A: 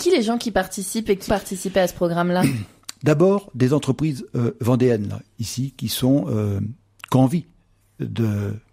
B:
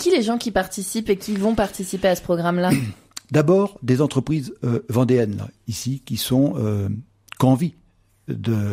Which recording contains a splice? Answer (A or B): A